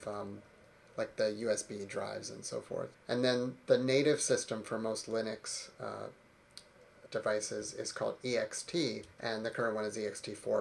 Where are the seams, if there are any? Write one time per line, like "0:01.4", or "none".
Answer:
0:02.9
0:07.1
0:09.1